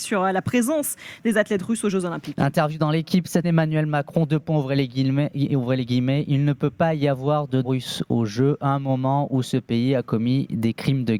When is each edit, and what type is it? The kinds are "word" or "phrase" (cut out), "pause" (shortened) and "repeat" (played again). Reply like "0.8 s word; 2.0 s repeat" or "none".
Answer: 3.4 s word; 7.6 s word